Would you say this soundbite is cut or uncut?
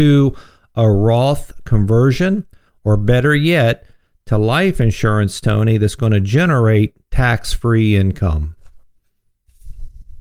uncut